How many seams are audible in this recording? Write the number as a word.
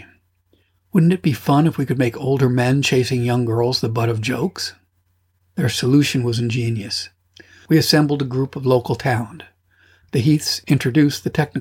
zero